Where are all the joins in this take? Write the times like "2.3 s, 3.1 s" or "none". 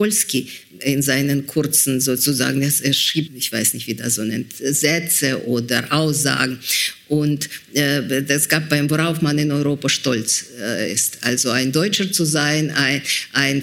3.3 s